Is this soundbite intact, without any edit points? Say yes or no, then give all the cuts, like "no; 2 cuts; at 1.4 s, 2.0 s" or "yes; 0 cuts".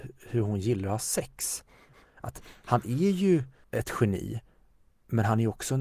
yes; 0 cuts